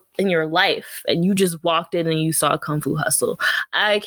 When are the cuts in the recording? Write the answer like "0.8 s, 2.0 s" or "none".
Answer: none